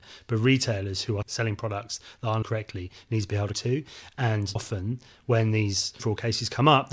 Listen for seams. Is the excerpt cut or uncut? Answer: cut